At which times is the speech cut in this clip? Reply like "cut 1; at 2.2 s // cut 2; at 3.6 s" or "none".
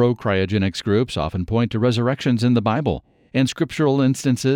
none